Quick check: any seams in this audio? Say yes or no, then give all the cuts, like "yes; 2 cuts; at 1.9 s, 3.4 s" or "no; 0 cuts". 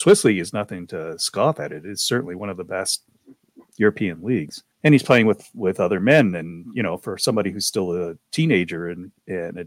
yes; 1 cut; at 4.7 s